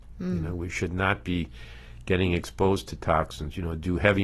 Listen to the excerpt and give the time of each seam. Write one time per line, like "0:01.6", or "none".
none